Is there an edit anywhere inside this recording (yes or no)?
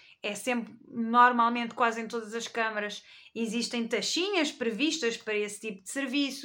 no